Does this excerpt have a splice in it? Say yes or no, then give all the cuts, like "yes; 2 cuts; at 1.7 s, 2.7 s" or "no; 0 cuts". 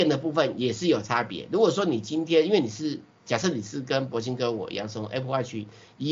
no; 0 cuts